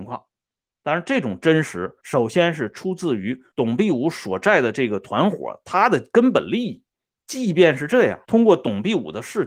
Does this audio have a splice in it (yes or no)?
yes